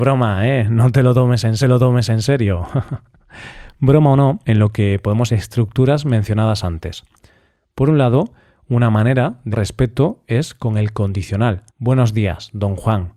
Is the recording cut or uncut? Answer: cut